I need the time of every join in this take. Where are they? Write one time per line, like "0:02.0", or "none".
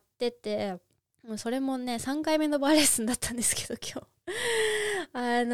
0:01.0